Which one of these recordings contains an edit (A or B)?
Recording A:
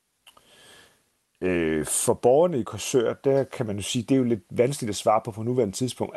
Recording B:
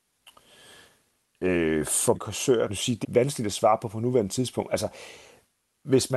B